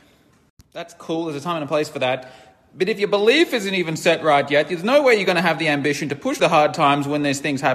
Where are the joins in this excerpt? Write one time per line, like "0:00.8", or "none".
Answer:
0:06.4